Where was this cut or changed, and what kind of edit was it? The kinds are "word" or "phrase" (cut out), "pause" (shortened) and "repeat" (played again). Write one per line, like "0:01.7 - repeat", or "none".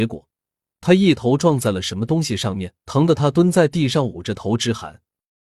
0:02.8 - pause